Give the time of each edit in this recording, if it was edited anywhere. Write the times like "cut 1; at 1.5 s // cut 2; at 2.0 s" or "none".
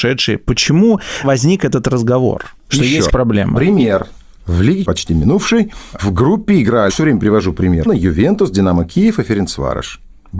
cut 1; at 1.2 s // cut 2; at 3.1 s // cut 3; at 4.8 s // cut 4; at 6.9 s // cut 5; at 7.9 s